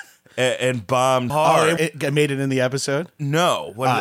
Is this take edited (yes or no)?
yes